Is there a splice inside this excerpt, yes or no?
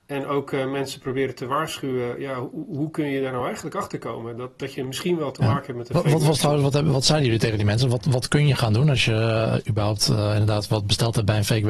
no